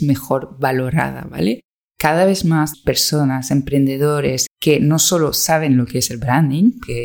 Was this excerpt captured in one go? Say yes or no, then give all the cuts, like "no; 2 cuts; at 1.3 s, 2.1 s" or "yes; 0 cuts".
no; 2 cuts; at 2.7 s, 4.5 s